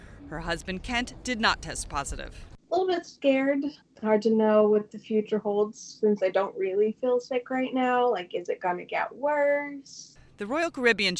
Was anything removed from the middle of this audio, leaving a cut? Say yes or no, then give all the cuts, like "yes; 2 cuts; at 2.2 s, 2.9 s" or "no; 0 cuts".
no; 0 cuts